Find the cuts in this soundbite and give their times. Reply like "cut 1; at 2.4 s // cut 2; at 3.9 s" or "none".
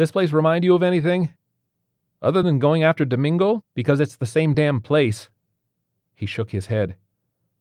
none